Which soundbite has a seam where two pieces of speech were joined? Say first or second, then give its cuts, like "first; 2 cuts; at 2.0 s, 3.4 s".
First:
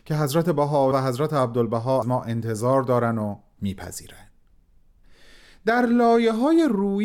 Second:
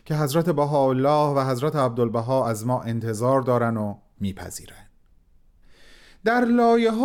first; 2 cuts; at 0.9 s, 2.0 s